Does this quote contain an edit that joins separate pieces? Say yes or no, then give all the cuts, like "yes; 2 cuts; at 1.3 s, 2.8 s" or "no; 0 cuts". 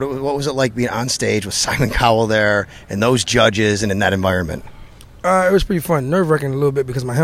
no; 0 cuts